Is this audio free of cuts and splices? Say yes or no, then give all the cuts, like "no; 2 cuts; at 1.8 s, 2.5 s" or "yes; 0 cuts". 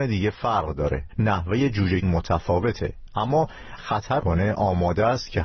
no; 4 cuts; at 1.1 s, 2.0 s, 3.8 s, 4.2 s